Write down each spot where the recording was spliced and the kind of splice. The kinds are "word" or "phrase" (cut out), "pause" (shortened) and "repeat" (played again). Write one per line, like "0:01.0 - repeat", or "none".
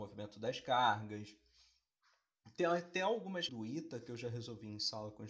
0:03.5 - word